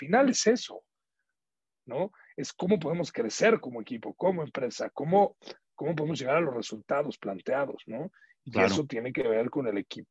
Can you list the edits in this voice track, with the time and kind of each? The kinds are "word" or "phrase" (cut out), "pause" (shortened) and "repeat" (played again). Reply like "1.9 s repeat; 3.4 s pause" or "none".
none